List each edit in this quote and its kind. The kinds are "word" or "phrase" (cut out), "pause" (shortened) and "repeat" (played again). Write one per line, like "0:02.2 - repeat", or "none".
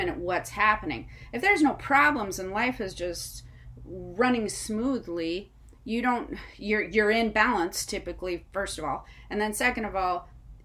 none